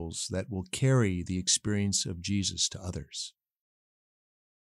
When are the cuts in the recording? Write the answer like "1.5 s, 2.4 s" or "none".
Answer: none